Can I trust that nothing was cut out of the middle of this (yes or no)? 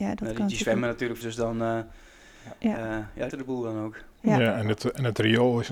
no